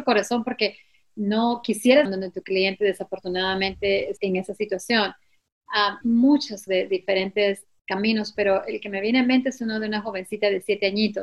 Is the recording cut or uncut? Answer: cut